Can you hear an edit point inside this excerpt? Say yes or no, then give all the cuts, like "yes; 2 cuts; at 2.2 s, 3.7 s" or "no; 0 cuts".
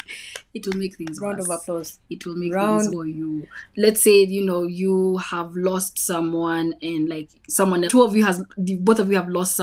yes; 3 cuts; at 2.9 s, 3.7 s, 7.9 s